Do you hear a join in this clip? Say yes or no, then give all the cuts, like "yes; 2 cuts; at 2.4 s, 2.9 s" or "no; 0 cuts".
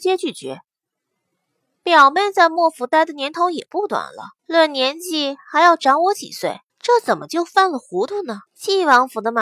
yes; 3 cuts; at 4.4 s, 6.7 s, 8.5 s